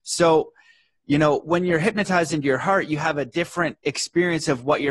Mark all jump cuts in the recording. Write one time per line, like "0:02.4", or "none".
0:03.8